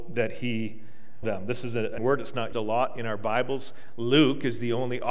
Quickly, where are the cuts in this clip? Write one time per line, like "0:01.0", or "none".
0:01.2
0:02.0
0:02.5